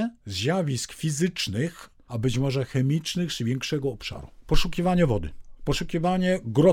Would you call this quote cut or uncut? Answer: uncut